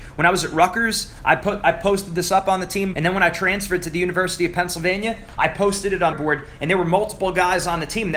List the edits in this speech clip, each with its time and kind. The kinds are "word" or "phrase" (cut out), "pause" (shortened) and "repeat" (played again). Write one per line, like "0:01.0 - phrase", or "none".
0:02.9 - word
0:06.1 - word